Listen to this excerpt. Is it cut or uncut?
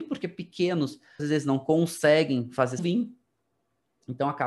cut